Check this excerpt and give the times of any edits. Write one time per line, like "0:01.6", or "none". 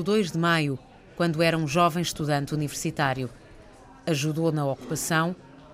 none